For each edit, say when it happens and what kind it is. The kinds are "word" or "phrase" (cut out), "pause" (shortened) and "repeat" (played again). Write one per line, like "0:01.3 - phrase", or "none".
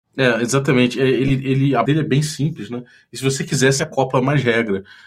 0:01.9 - word